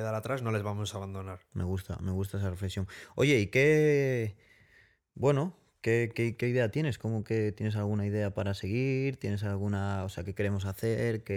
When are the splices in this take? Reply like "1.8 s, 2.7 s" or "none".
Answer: none